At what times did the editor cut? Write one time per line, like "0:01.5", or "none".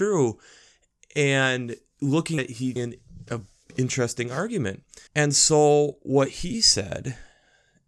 0:02.4
0:02.8
0:05.1